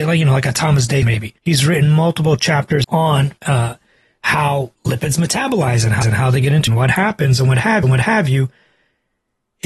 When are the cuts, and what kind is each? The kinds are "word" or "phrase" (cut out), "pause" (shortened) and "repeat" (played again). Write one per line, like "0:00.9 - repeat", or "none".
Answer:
0:01.0 - word
0:01.4 - pause
0:02.8 - phrase
0:03.4 - pause
0:04.7 - pause
0:06.0 - repeat
0:06.7 - phrase
0:07.8 - repeat